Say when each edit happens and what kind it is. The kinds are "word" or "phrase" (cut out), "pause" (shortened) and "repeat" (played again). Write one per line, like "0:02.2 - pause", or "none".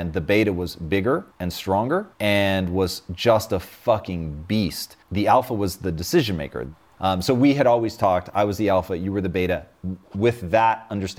0:01.3 - pause
0:02.1 - pause
0:05.0 - pause